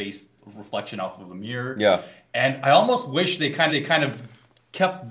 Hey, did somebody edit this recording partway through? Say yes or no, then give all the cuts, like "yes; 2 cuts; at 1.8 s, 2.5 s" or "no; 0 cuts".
yes; 1 cut; at 3.7 s